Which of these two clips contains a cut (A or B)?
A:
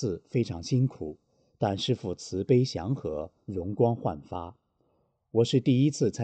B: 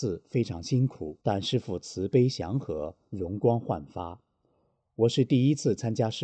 B